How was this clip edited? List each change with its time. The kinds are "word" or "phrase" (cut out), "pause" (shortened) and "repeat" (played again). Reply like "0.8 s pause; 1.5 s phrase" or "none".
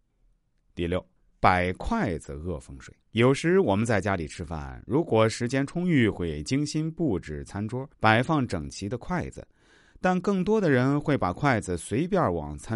1.2 s pause; 3.0 s pause; 7.9 s pause